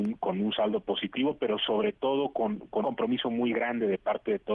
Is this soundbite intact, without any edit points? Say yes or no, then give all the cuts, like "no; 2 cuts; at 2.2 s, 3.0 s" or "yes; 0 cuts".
no; 1 cut; at 2.8 s